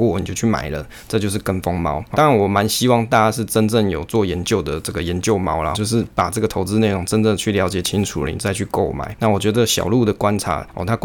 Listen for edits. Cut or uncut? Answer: cut